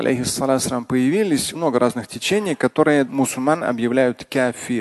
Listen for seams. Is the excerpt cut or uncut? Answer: cut